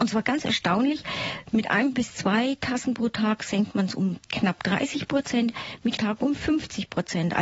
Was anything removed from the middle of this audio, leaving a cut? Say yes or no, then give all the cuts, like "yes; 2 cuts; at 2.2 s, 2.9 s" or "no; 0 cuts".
yes; 1 cut; at 6.0 s